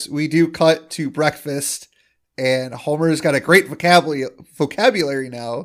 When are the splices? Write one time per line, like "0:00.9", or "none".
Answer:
none